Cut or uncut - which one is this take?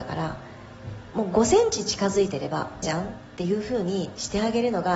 cut